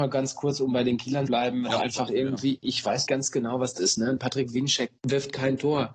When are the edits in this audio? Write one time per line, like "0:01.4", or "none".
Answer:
0:01.3
0:01.7
0:03.1
0:03.8
0:05.0